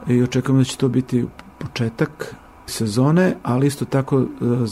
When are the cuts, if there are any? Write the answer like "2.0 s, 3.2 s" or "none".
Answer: none